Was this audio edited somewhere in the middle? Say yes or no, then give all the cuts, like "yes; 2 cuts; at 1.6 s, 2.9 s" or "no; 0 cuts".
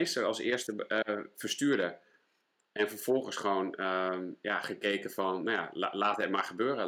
no; 0 cuts